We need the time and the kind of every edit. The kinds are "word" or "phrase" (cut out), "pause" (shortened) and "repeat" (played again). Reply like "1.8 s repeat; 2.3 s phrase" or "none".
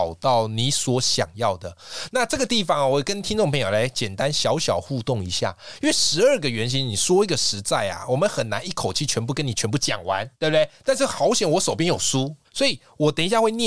10.3 s pause; 12.4 s pause